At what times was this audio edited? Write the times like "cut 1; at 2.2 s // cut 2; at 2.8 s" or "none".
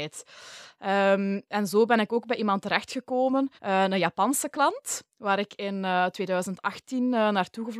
cut 1; at 3.6 s